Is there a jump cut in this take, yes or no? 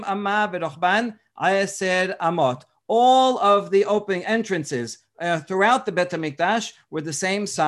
no